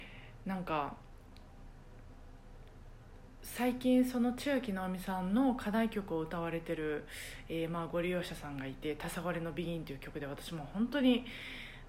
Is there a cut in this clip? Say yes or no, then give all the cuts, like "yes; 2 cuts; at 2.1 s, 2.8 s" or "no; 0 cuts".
no; 0 cuts